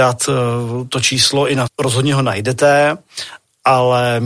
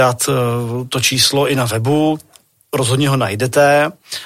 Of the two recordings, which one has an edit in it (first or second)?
first